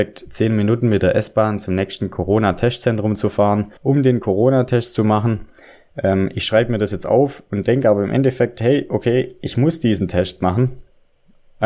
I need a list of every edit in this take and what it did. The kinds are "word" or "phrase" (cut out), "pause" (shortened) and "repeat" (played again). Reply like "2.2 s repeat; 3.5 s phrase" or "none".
3.8 s pause